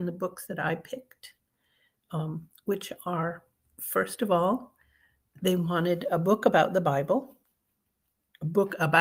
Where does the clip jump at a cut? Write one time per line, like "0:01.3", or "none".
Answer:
none